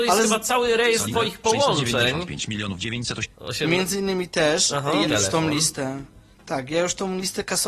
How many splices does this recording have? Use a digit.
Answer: 4